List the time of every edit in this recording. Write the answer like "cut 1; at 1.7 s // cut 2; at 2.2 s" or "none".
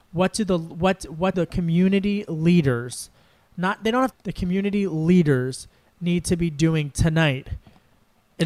cut 1; at 1.3 s // cut 2; at 4.1 s